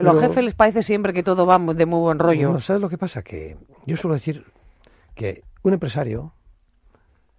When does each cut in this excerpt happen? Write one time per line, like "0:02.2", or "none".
none